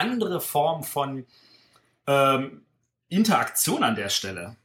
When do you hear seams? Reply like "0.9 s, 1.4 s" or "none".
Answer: none